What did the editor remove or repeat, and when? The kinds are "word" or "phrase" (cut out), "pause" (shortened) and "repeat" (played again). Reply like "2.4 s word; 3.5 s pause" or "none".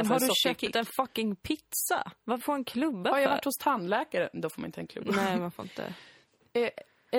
2.4 s phrase